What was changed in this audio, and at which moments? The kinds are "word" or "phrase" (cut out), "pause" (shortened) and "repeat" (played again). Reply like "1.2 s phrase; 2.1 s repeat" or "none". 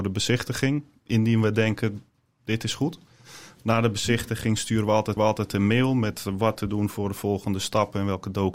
5.2 s repeat

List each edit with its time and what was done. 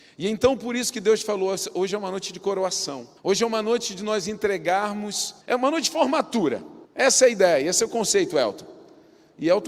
3.2 s pause; 5.4 s pause; 6.9 s pause

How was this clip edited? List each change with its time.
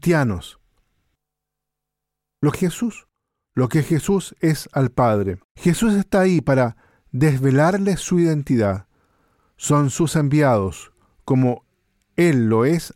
2.5 s phrase; 5.5 s pause

